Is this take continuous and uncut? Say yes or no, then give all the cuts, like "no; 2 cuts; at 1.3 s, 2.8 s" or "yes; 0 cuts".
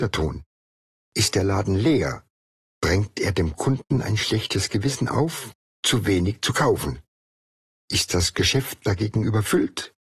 yes; 0 cuts